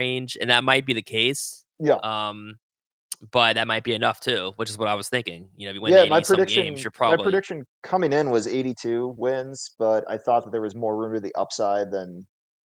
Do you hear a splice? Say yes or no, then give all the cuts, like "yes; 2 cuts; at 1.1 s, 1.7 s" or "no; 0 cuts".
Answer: no; 0 cuts